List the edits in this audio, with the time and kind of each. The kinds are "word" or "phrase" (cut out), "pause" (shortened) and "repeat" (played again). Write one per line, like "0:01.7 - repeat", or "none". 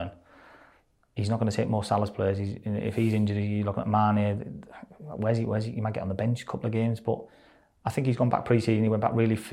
none